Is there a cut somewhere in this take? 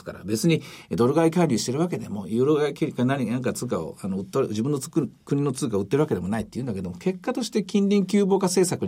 no; 0 cuts

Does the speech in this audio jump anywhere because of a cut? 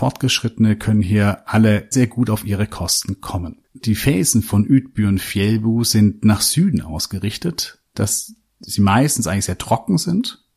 yes; 3 cuts; at 1.9 s, 3.6 s, 7.9 s

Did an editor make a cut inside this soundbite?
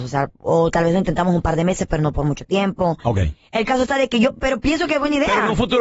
no; 0 cuts

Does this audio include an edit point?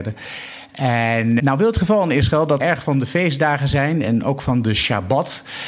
yes; 2 cuts; at 1.4 s, 2.6 s

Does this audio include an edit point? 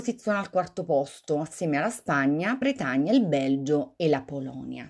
yes; 1 cut; at 2.6 s

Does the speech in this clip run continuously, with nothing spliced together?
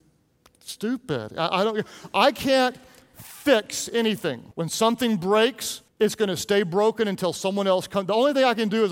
no; 2 cuts; at 4.5 s, 5.9 s

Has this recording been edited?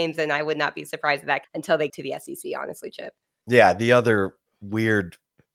yes; 2 cuts; at 1.4 s, 1.9 s

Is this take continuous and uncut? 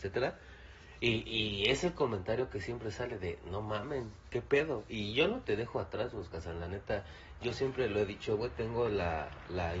yes; 0 cuts

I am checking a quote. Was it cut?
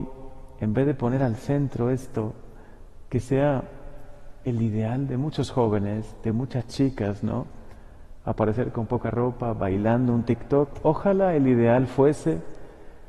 no; 0 cuts

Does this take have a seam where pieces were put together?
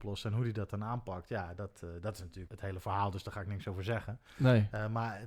yes; 1 cut; at 2.5 s

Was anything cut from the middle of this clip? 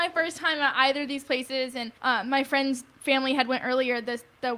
yes; 1 cut; at 2.0 s

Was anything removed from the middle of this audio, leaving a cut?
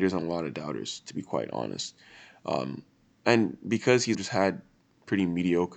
yes; 1 cut; at 4.1 s

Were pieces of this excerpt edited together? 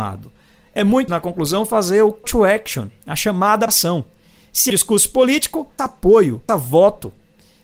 yes; 6 cuts; at 1.1 s, 2.2 s, 3.7 s, 4.7 s, 5.8 s, 6.5 s

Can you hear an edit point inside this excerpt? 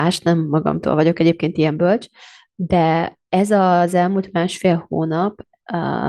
no; 0 cuts

